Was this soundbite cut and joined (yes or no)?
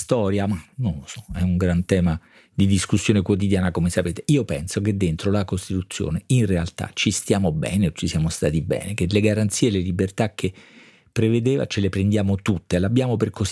no